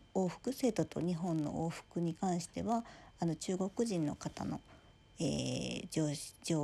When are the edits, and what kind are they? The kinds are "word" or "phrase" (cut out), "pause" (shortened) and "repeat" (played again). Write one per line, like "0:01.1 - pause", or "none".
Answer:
none